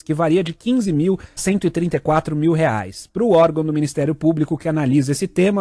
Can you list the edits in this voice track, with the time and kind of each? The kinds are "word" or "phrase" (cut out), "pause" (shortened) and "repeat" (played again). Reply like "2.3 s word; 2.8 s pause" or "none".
1.4 s word